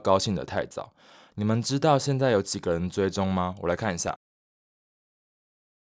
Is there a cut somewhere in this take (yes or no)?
no